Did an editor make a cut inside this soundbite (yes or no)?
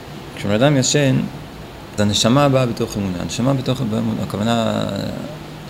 yes